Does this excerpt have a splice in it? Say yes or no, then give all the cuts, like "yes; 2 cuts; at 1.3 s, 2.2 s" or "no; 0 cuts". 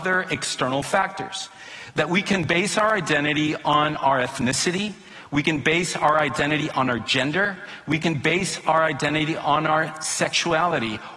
no; 0 cuts